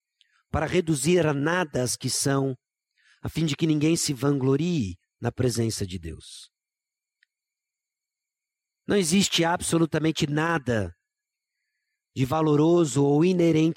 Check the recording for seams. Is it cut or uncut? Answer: uncut